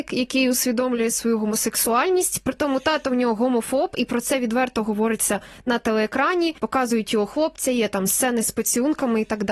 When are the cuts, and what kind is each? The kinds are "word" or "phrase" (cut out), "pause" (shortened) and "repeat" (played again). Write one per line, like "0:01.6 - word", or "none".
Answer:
0:06.6 - pause